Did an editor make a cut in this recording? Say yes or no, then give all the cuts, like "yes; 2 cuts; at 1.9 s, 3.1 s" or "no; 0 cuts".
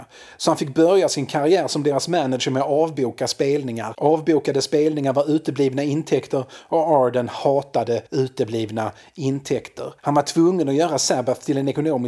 yes; 2 cuts; at 8.1 s, 10.0 s